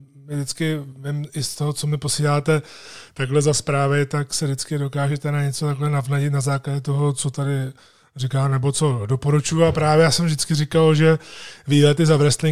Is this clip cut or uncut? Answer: uncut